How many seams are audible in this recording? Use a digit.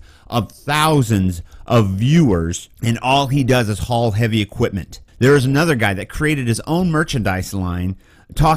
2